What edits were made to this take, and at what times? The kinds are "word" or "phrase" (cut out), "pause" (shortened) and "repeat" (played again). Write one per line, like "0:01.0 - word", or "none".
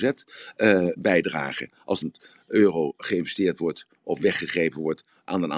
0:01.0 - word
0:02.0 - word